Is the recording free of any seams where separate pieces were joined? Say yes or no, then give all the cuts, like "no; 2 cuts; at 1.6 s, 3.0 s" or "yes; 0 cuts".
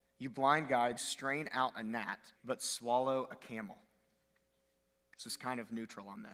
no; 3 cuts; at 1.0 s, 2.4 s, 5.2 s